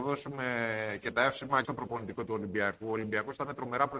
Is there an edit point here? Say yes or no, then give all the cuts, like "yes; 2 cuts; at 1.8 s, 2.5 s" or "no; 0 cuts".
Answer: yes; 2 cuts; at 1.6 s, 2.3 s